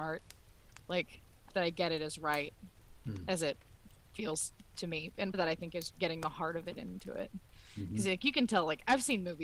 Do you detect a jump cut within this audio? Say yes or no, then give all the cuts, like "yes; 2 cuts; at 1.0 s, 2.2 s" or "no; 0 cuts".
yes; 3 cuts; at 1.5 s, 5.3 s, 5.9 s